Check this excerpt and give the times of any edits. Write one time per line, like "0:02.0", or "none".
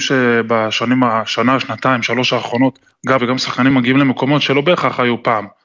0:03.2
0:03.7